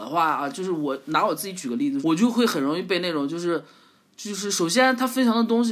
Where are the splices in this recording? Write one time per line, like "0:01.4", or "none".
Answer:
0:02.0